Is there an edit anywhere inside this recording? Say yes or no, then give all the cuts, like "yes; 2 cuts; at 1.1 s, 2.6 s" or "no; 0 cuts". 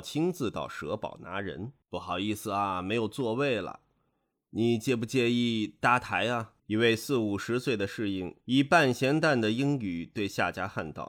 yes; 3 cuts; at 1.8 s, 6.6 s, 8.4 s